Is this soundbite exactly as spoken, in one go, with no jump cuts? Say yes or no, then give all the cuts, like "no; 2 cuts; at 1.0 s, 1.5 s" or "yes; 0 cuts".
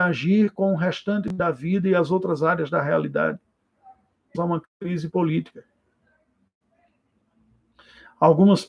no; 1 cut; at 4.3 s